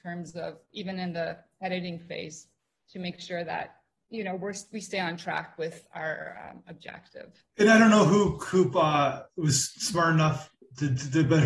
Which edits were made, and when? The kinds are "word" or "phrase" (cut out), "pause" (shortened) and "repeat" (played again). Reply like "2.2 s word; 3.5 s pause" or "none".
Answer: none